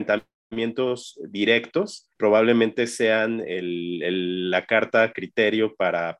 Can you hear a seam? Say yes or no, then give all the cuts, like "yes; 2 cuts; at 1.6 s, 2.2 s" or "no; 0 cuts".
yes; 1 cut; at 2.1 s